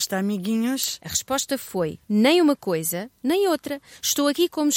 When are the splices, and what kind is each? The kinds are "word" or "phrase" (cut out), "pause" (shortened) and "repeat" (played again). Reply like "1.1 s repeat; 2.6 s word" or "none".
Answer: 2.0 s pause

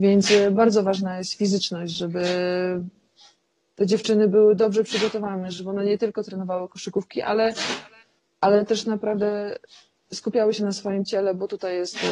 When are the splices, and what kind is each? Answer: none

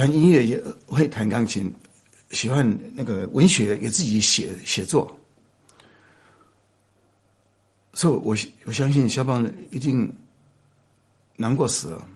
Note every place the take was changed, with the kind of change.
none

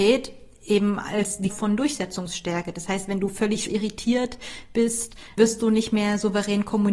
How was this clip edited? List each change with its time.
1.5 s word; 3.7 s word; 5.4 s word

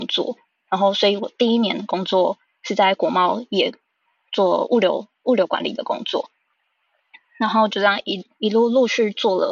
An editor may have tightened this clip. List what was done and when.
none

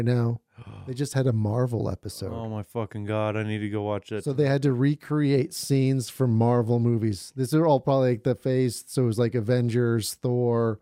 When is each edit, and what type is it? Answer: none

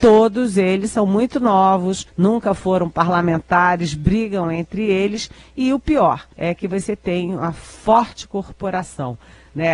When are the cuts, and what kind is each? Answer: 2.1 s pause; 6.3 s pause

